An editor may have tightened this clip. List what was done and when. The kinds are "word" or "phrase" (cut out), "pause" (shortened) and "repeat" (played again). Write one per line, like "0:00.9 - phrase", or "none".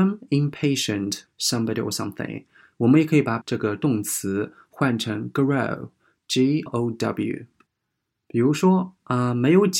0:01.3 - word
0:03.4 - word
0:06.7 - word